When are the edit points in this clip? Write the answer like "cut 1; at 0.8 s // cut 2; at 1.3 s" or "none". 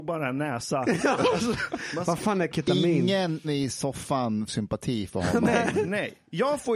cut 1; at 3.4 s // cut 2; at 4.5 s